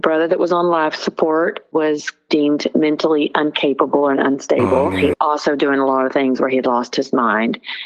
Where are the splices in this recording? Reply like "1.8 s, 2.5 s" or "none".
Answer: 5.1 s